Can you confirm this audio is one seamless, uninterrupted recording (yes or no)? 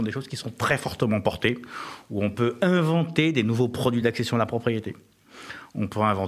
yes